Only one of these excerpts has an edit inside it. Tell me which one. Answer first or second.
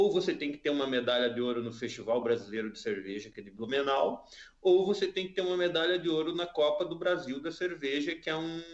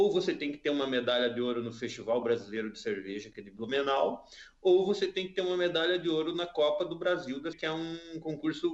second